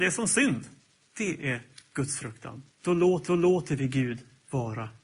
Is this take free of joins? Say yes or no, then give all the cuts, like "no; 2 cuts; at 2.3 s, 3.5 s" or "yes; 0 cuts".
no; 3 cuts; at 1.0 s, 2.7 s, 3.3 s